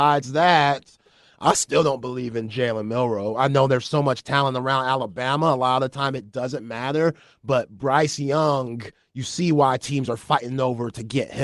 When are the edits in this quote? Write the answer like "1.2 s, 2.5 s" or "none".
none